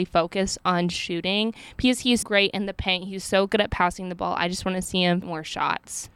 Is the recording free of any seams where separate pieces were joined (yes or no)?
no